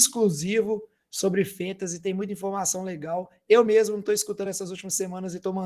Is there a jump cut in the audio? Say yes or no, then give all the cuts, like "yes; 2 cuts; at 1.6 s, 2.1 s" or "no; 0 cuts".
no; 0 cuts